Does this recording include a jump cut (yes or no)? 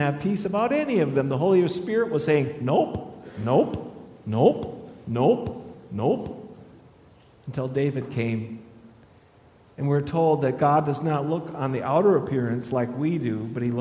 no